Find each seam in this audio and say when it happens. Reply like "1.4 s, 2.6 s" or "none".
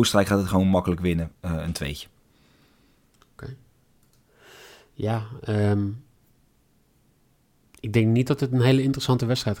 none